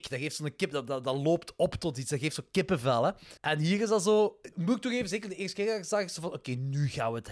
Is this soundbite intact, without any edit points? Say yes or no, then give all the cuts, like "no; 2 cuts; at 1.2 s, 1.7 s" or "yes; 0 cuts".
no; 2 cuts; at 3.4 s, 4.5 s